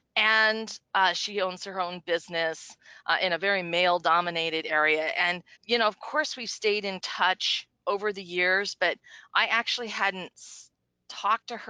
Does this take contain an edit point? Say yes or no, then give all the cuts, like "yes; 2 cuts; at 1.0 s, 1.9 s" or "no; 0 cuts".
yes; 1 cut; at 5.5 s